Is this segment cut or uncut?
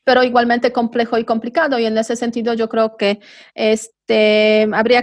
uncut